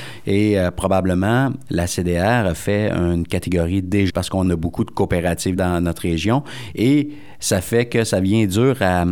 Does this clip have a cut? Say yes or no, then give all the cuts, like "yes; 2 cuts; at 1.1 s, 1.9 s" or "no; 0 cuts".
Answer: yes; 3 cuts; at 1.7 s, 4.1 s, 5.6 s